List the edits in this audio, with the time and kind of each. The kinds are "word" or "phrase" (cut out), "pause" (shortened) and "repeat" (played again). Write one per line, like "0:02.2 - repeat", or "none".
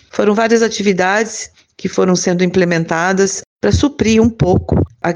none